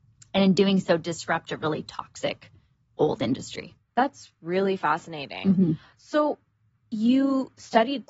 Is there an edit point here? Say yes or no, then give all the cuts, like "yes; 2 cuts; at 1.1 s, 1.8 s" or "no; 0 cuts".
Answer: no; 0 cuts